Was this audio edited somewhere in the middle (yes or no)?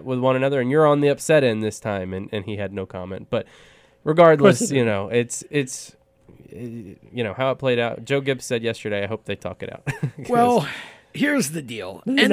no